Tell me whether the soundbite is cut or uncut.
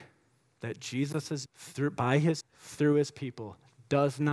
cut